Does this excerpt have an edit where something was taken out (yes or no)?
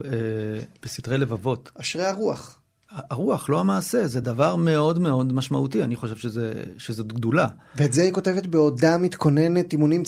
no